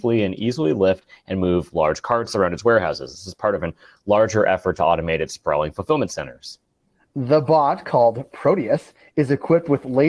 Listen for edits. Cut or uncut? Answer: uncut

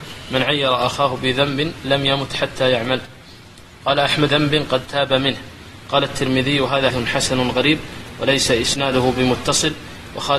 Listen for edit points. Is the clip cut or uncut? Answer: cut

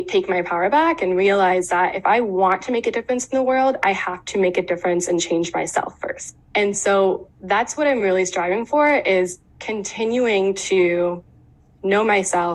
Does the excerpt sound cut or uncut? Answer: uncut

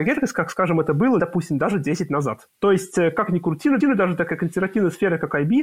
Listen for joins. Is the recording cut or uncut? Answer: cut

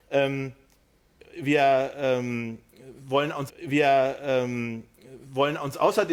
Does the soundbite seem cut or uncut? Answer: cut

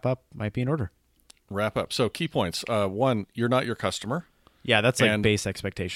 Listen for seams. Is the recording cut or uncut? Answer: uncut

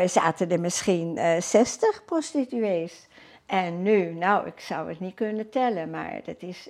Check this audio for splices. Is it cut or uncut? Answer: uncut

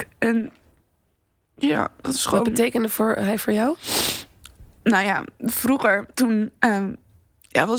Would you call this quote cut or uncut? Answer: cut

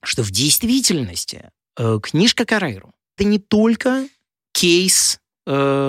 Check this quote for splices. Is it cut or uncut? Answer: cut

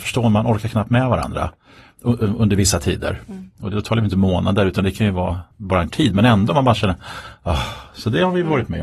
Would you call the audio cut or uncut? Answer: cut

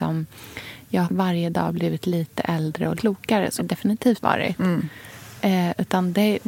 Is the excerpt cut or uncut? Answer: cut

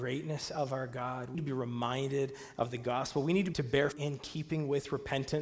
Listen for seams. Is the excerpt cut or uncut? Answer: cut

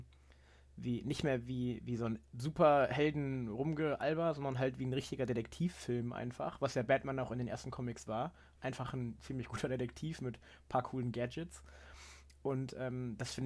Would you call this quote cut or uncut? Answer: cut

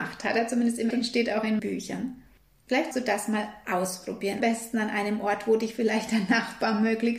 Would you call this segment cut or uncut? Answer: cut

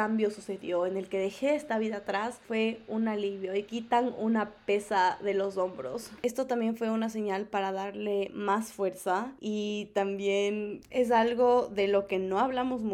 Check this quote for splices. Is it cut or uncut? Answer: uncut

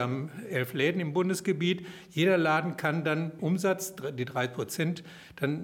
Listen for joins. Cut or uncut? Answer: cut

